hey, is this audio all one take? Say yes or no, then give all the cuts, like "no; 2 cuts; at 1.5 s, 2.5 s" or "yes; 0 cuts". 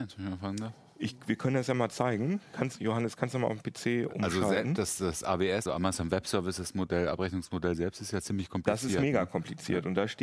no; 1 cut; at 5.7 s